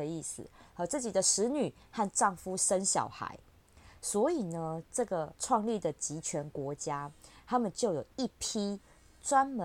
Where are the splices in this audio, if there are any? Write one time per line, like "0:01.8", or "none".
0:05.4

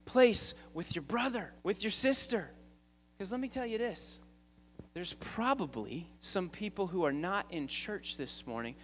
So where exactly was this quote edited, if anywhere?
0:01.6
0:02.8
0:04.9
0:06.2

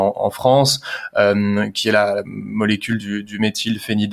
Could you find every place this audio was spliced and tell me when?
none

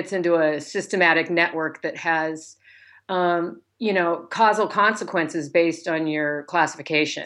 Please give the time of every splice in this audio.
none

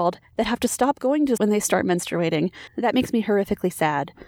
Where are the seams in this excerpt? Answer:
0:01.4

